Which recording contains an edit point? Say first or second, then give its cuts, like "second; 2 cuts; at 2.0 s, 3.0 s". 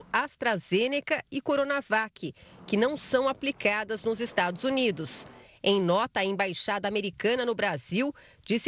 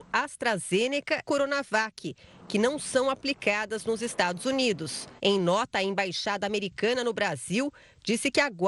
second; 2 cuts; at 1.2 s, 5.2 s